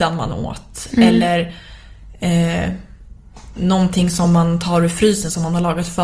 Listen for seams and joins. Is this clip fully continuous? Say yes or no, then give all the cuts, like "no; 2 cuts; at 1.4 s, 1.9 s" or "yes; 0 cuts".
yes; 0 cuts